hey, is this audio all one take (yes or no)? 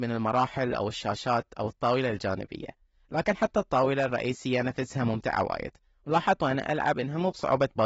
yes